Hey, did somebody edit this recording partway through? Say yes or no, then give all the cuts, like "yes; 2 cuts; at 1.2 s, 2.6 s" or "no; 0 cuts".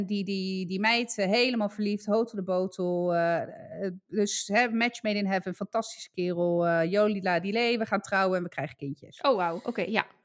no; 0 cuts